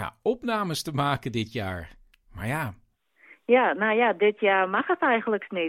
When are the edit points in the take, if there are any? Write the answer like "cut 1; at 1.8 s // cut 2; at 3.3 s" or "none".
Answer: none